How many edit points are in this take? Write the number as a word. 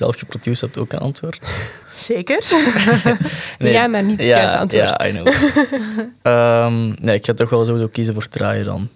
one